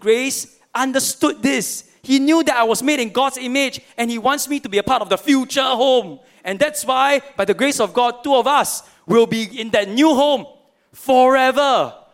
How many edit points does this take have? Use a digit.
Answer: 0